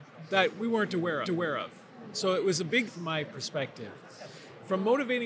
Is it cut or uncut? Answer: cut